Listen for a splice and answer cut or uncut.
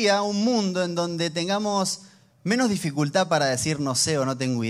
uncut